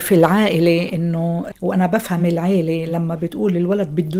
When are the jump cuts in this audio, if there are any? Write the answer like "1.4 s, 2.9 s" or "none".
none